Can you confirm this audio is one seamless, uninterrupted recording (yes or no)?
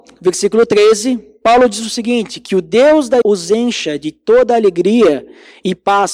no